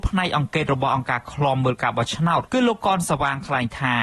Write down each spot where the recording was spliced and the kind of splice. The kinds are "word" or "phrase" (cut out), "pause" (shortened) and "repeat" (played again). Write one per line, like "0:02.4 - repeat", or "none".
0:02.5 - word